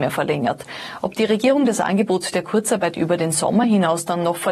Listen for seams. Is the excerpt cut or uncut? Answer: uncut